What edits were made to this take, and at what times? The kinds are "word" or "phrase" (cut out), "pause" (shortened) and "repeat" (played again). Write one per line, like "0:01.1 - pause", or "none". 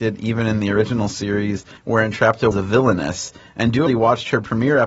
0:01.8 - word
0:02.5 - word
0:03.9 - word